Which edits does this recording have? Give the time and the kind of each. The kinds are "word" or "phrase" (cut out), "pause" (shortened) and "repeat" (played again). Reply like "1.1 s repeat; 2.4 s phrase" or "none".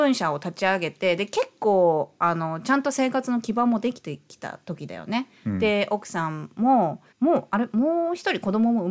7.1 s pause